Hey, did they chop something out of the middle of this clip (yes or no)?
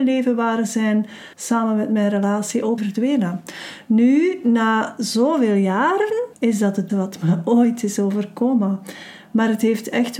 yes